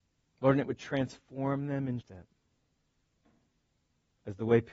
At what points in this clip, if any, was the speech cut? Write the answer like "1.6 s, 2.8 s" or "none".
2.0 s